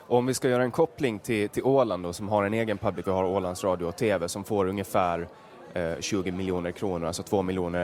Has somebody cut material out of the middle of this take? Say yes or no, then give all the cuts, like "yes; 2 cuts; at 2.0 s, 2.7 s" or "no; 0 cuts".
yes; 1 cut; at 3.0 s